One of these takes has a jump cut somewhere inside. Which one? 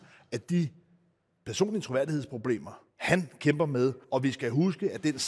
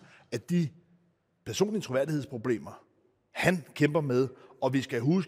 first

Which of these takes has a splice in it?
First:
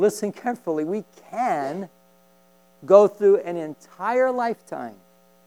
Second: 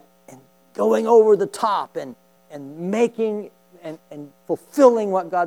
second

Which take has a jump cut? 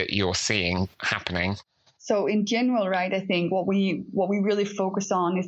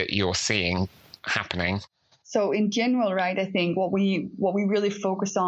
first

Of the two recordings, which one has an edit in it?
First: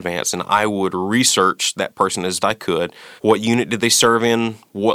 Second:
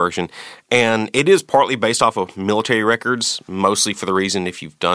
first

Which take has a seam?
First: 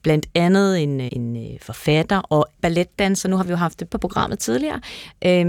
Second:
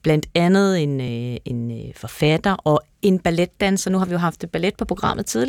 first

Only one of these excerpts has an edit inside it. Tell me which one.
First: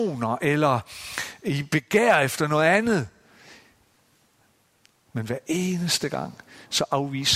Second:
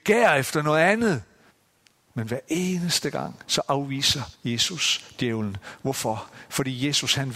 second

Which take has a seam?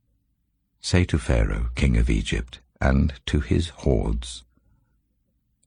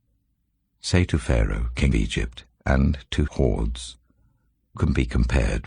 second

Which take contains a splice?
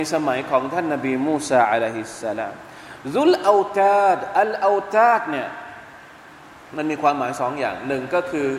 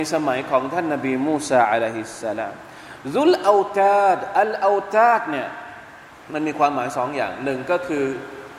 second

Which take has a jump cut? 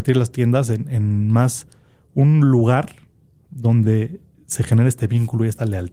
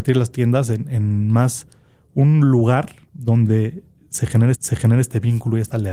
second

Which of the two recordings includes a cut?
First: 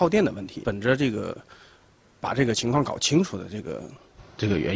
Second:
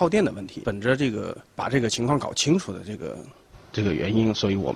second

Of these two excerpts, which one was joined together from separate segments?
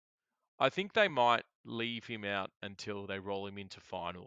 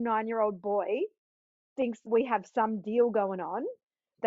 second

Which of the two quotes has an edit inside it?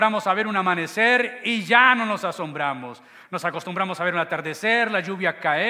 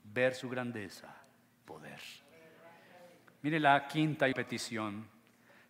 second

